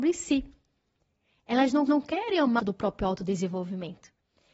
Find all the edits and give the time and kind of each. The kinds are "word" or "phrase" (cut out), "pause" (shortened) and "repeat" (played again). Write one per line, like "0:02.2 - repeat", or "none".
0:01.9 - repeat
0:02.6 - phrase